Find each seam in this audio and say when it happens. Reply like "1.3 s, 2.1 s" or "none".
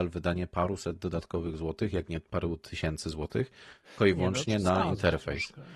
4.0 s